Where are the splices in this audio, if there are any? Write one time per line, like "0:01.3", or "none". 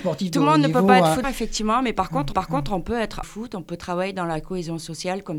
0:01.2
0:02.3
0:03.2